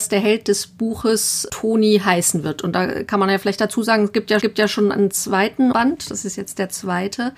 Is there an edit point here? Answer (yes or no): yes